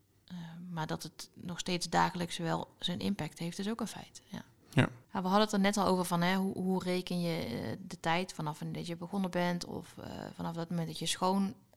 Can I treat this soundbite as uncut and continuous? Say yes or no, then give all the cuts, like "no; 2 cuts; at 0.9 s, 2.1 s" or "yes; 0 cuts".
yes; 0 cuts